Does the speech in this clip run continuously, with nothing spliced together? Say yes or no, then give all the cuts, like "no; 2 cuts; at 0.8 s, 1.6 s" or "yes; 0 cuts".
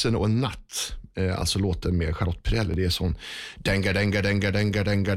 yes; 0 cuts